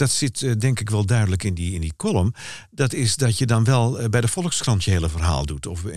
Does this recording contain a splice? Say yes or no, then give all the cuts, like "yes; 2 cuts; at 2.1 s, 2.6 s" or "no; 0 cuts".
no; 0 cuts